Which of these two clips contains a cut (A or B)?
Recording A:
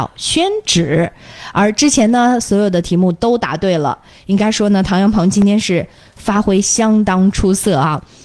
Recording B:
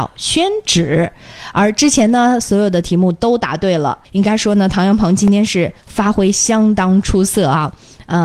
B